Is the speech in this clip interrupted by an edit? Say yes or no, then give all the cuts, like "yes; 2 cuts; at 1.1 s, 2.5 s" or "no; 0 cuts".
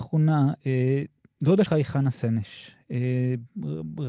yes; 1 cut; at 1.7 s